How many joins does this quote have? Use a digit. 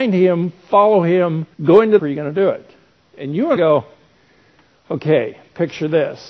3